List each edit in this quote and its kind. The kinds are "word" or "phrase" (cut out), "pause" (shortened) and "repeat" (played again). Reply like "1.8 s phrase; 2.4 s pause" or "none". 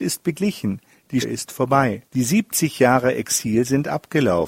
1.2 s word; 2.1 s pause